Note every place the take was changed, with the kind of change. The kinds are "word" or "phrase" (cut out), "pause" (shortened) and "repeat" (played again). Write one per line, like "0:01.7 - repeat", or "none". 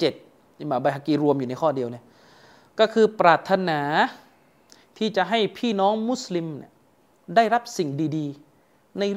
none